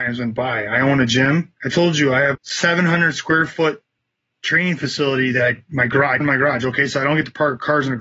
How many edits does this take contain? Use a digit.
3